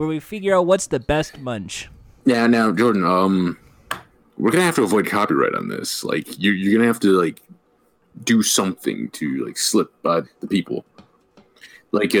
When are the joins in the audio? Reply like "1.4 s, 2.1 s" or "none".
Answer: 10.2 s